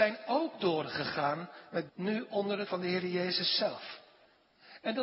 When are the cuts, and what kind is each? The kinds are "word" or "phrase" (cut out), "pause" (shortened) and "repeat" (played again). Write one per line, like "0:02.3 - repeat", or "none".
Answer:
0:01.9 - word
0:02.7 - word